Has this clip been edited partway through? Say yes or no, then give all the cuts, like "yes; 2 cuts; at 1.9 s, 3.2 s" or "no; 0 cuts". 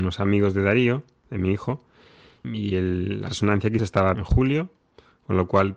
yes; 4 cuts; at 2.4 s, 3.3 s, 3.8 s, 4.1 s